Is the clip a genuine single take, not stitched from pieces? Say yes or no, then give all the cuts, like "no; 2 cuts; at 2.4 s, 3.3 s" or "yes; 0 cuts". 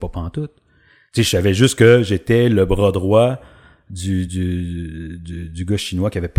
yes; 0 cuts